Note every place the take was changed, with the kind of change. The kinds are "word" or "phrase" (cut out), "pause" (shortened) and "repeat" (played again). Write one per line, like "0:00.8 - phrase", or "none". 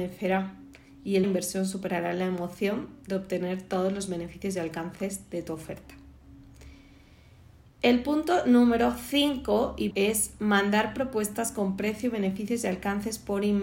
0:01.2 - phrase
0:09.9 - word